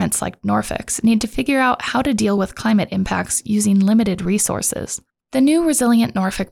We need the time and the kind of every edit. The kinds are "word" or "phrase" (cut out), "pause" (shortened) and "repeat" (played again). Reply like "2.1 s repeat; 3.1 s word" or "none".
none